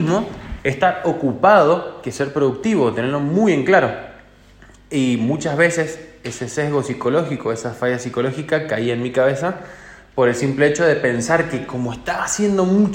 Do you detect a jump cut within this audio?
no; 0 cuts

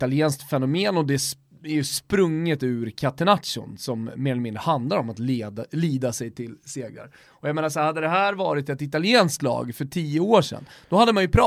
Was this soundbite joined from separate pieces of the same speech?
no; 0 cuts

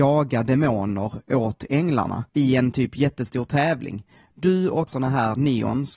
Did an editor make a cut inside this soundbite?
yes; 2 cuts; at 2.3 s, 4.9 s

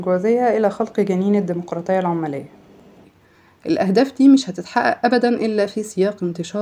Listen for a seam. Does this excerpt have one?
no; 0 cuts

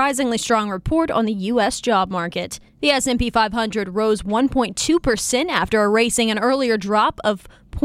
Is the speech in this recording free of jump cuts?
no; 1 cut; at 2.7 s

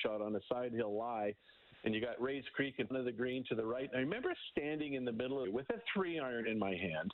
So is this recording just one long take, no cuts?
no; 2 cuts; at 2.9 s, 5.4 s

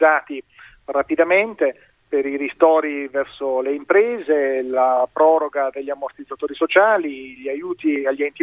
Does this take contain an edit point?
no; 0 cuts

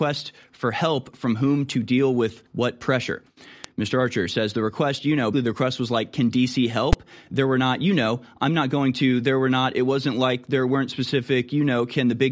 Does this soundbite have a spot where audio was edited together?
yes; 2 cuts; at 2.5 s, 5.3 s

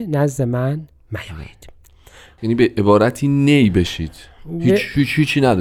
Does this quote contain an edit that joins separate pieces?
no; 0 cuts

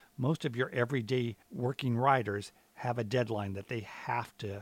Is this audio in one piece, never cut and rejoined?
no; 1 cut; at 1.4 s

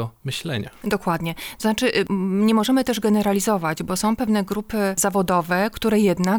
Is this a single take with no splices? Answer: yes; 0 cuts

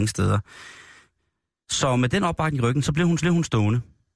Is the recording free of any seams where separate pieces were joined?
no; 1 cut; at 3.2 s

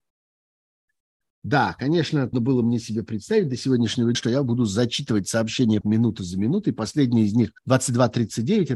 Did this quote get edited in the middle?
yes; 4 cuts; at 2.3 s, 4.1 s, 5.8 s, 7.6 s

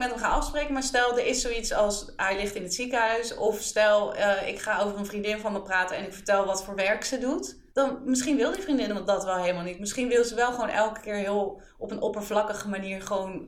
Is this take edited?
yes; 1 cut; at 7.7 s

